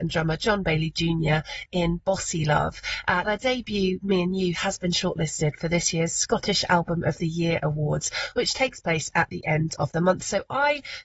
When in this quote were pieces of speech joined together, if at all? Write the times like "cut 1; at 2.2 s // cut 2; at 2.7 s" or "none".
cut 1; at 3.2 s